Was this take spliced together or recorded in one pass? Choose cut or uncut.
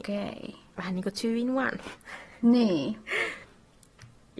uncut